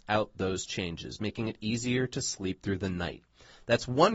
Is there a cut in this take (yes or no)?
no